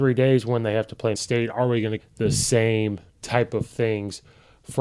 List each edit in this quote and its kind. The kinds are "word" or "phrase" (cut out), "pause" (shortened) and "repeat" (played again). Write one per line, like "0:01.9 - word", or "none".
0:01.1 - word
0:02.0 - phrase
0:03.1 - pause